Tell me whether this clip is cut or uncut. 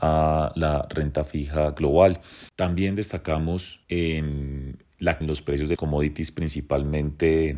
cut